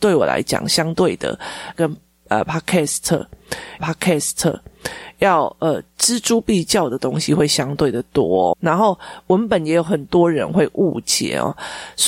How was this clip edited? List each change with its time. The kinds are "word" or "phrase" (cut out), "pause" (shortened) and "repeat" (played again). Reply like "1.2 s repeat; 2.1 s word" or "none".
1.7 s word; 3.8 s repeat; 8.5 s word